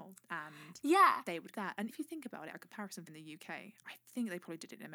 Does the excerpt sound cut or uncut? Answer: cut